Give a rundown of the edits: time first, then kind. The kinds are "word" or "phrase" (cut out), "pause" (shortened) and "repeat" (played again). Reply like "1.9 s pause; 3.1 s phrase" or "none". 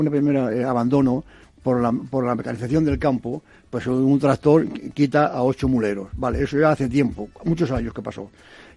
none